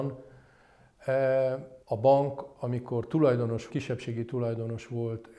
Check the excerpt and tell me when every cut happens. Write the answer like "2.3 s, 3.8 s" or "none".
1.8 s, 3.7 s